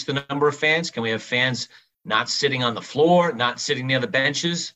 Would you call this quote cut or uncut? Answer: uncut